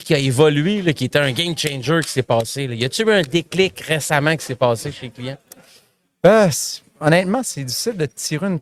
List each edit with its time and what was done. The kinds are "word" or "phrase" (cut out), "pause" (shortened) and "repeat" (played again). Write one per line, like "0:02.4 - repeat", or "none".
none